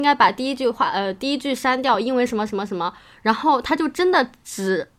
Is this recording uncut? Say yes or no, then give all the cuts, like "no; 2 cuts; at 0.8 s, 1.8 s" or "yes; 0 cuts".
yes; 0 cuts